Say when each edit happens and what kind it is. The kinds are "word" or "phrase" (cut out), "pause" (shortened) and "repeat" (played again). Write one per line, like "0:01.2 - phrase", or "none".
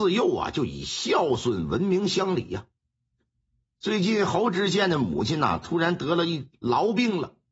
none